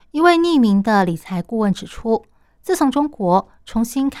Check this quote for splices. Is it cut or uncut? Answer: uncut